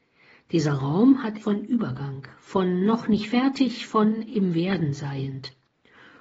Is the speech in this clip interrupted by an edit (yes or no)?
yes